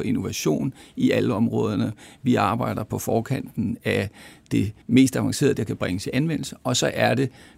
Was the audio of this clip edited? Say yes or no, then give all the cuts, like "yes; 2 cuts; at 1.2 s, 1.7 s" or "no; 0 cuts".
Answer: yes; 2 cuts; at 4.8 s, 5.6 s